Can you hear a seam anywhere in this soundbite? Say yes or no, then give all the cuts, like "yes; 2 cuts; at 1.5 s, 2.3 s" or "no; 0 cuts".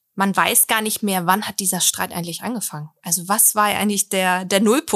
no; 0 cuts